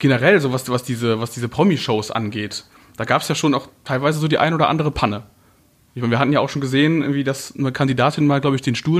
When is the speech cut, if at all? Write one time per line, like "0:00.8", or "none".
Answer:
none